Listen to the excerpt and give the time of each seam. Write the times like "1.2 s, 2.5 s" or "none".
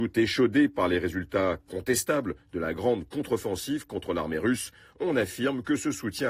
none